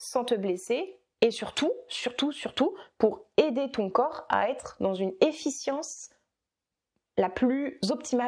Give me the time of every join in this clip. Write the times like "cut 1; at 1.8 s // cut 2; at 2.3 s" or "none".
none